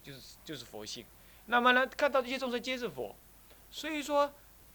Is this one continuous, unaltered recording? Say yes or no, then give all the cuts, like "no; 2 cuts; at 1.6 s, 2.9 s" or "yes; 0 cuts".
yes; 0 cuts